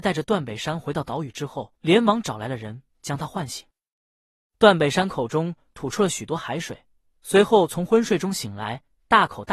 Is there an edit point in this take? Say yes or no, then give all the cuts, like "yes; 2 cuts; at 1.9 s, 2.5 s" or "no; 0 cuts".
yes; 2 cuts; at 1.8 s, 2.9 s